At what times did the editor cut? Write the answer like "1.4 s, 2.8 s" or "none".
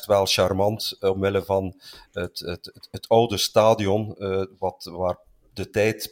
none